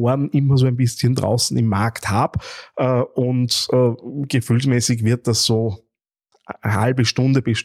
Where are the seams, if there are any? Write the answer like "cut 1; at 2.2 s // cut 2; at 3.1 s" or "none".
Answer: none